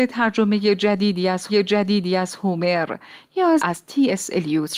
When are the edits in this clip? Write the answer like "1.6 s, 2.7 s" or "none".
1.5 s, 3.6 s